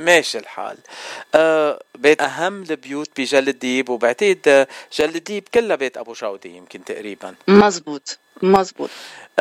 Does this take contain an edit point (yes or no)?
yes